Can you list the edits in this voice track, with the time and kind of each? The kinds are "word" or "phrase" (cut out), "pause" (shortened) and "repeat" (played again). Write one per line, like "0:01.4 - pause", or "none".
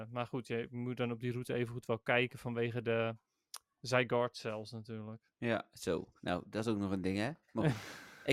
0:05.3 - pause
0:06.2 - pause